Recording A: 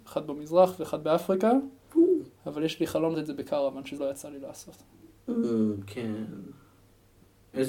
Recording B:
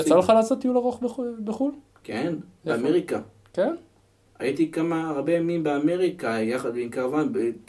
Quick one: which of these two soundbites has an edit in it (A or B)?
A